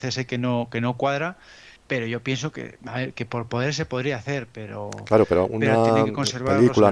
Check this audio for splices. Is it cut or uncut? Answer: cut